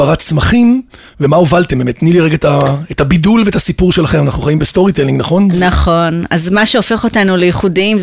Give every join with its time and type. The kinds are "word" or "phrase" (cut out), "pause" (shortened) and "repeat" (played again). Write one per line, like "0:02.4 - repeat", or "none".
none